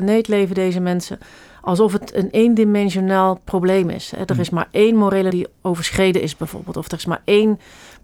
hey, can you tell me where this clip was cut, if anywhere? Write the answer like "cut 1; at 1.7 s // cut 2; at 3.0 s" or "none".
cut 1; at 5.3 s